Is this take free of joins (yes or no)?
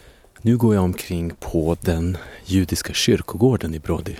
yes